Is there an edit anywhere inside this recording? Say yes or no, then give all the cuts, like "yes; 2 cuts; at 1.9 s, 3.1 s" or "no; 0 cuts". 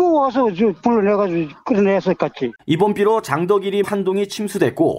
yes; 2 cuts; at 2.6 s, 3.8 s